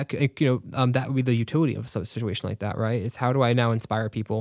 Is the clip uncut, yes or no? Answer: yes